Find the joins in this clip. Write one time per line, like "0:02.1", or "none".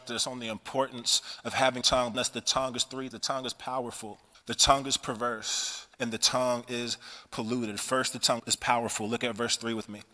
0:01.8
0:02.1
0:03.1
0:04.3
0:05.9
0:08.4